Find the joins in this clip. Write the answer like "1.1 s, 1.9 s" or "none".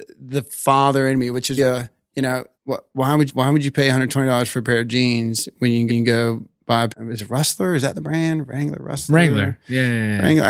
1.6 s, 2.5 s, 3.3 s, 5.9 s, 6.9 s